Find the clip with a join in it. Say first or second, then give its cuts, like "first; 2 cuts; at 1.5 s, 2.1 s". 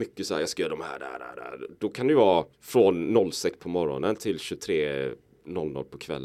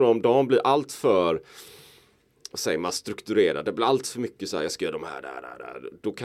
first; 1 cut; at 2.5 s